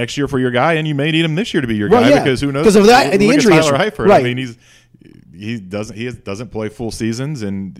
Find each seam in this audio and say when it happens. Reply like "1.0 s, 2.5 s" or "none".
none